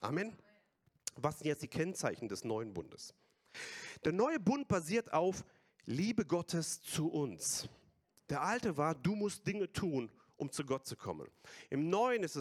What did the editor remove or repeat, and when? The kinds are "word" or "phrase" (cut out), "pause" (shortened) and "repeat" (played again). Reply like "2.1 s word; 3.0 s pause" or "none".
none